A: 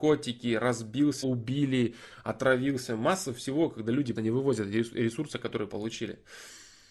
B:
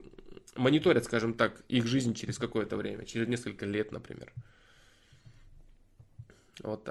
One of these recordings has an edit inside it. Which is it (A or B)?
A